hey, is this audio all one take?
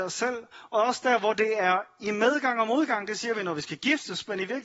yes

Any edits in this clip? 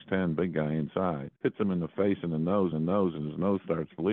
yes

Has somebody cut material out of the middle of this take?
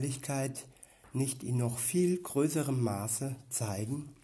no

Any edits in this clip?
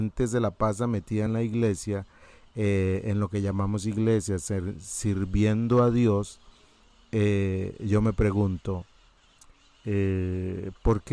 no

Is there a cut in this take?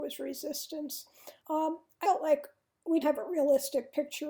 yes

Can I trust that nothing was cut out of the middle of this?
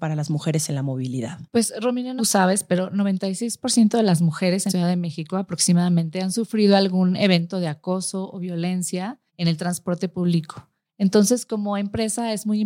no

